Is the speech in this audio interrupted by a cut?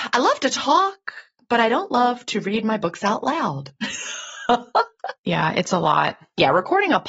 no; 0 cuts

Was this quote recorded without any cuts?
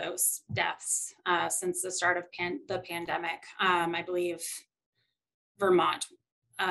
yes; 0 cuts

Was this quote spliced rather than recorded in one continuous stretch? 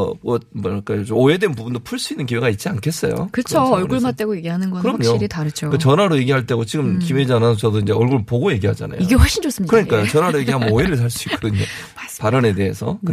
no; 0 cuts

